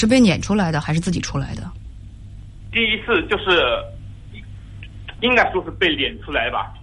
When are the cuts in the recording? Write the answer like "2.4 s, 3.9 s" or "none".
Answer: 5.2 s